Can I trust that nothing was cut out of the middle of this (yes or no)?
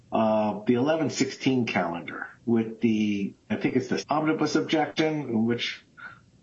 no